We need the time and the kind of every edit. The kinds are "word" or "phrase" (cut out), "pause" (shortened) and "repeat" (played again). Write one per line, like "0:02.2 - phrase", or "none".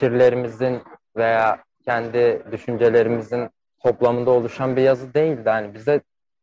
none